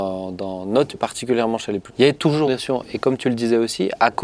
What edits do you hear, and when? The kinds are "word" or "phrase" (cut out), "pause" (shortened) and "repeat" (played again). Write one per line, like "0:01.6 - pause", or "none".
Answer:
0:00.9 - word
0:01.9 - word
0:02.5 - word